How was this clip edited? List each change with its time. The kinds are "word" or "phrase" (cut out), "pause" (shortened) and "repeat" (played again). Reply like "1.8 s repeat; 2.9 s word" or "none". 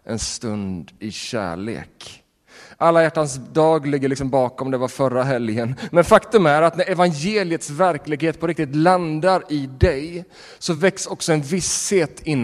none